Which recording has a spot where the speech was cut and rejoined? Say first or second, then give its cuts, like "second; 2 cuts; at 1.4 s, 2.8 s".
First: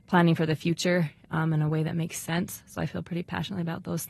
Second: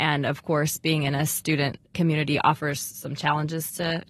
second; 1 cut; at 1.8 s